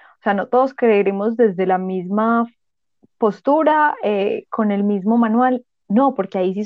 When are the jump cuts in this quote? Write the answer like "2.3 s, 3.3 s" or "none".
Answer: none

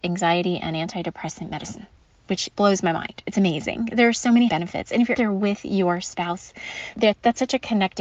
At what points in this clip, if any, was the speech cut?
2.5 s, 4.5 s, 5.1 s, 6.9 s

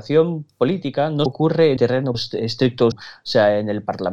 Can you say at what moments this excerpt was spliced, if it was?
1.3 s, 1.8 s, 2.1 s, 2.9 s

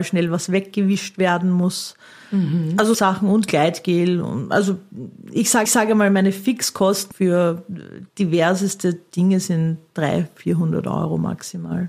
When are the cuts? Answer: 2.9 s, 5.7 s, 7.1 s, 8.1 s

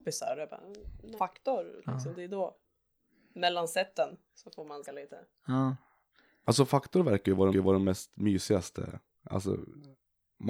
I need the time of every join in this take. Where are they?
1.2 s, 4.8 s, 7.5 s

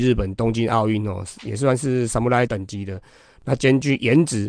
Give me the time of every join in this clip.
2.5 s

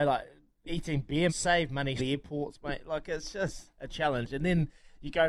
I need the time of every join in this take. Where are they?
1.3 s, 2.0 s

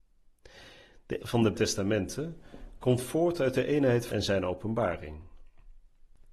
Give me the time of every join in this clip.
1.2 s, 1.5 s, 4.1 s

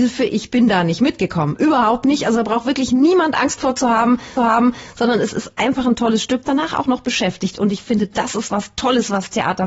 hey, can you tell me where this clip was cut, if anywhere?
4.4 s, 6.4 s

